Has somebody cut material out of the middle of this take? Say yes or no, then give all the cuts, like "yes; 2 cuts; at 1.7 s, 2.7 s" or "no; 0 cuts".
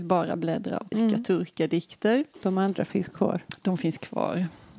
yes; 2 cuts; at 0.9 s, 2.3 s